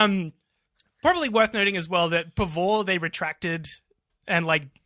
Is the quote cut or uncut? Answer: uncut